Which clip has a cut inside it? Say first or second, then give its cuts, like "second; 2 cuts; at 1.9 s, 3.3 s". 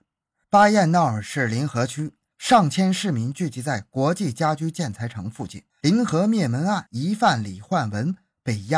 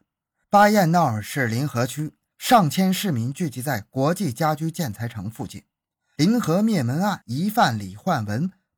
first; 1 cut; at 5.7 s